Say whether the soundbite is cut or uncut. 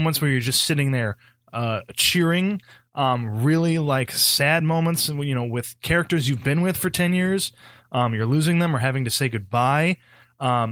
uncut